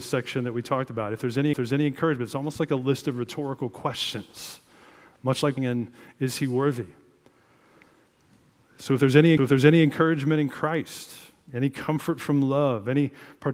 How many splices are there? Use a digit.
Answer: 3